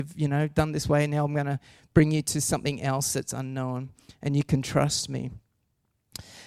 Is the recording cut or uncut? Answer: uncut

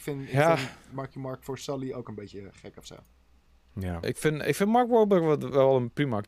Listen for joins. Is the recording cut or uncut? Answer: uncut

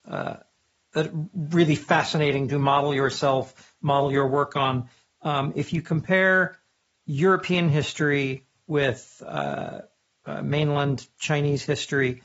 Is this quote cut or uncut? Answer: uncut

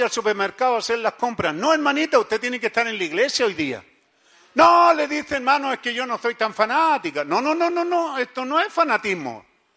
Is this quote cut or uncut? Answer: uncut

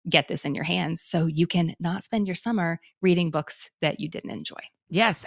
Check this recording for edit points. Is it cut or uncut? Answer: uncut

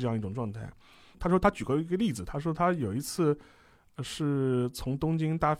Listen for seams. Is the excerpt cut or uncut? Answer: uncut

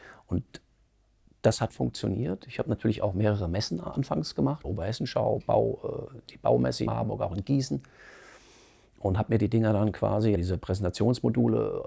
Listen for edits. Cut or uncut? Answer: cut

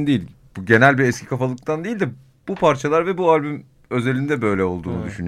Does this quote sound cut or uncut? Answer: uncut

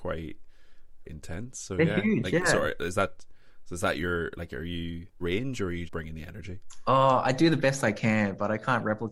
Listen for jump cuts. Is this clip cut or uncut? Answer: cut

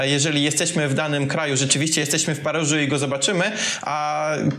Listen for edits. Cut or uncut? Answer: uncut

